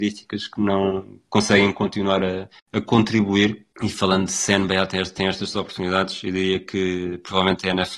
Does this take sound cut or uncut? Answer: cut